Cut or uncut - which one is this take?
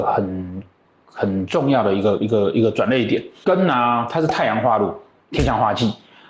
uncut